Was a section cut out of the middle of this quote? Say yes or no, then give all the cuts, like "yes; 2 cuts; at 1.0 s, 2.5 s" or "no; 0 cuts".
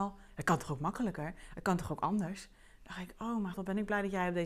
yes; 1 cut; at 3.5 s